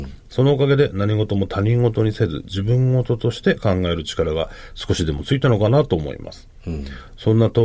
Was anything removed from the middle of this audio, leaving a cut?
no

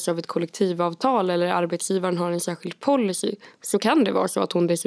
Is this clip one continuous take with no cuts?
yes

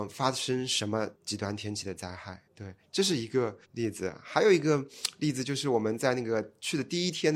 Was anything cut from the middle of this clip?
yes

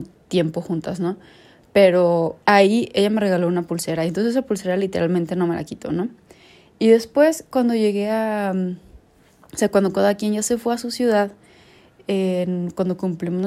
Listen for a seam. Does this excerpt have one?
yes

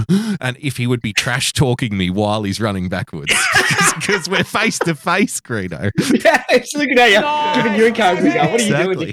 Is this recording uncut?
yes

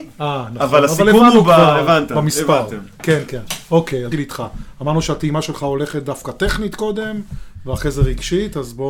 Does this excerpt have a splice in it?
yes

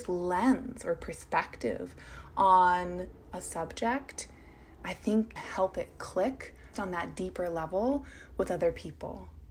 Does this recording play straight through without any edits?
no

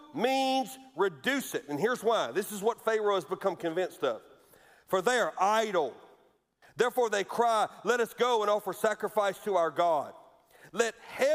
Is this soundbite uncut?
yes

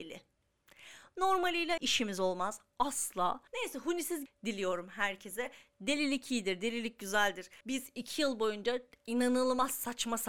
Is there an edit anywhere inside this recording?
yes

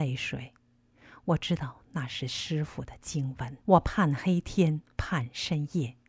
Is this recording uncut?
no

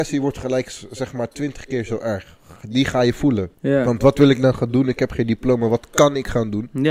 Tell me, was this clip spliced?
yes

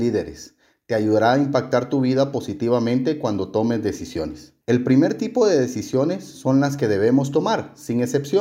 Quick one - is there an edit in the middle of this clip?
yes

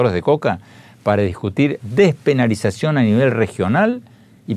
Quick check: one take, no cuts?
no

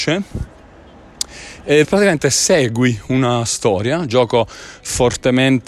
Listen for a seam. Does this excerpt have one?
yes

